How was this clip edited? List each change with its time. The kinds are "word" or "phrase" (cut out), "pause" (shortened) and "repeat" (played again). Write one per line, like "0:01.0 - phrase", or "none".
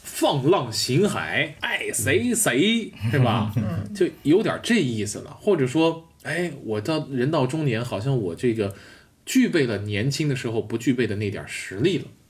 0:01.6 - word